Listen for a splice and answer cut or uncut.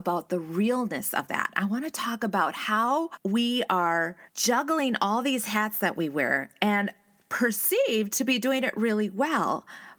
uncut